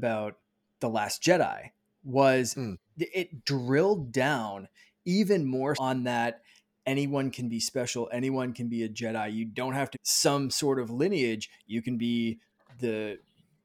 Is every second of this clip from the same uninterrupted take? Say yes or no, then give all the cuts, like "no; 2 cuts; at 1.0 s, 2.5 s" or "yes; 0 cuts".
no; 2 cuts; at 5.7 s, 9.9 s